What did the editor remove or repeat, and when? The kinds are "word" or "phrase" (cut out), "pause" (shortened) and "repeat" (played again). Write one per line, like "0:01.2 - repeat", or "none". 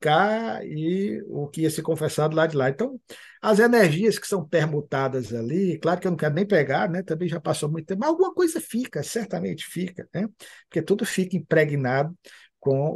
none